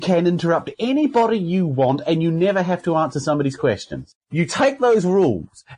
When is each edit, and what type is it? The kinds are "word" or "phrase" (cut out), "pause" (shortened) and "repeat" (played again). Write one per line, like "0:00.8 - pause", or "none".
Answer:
0:04.2 - pause

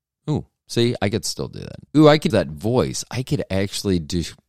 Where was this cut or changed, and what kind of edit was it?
0:01.9 - pause
0:02.3 - word

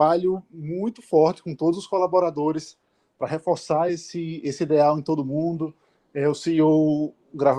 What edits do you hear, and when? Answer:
none

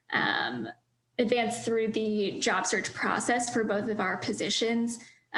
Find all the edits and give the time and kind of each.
none

